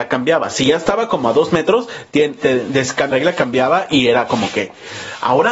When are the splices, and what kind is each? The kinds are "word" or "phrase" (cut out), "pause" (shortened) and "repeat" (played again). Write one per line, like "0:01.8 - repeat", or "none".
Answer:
0:03.1 - word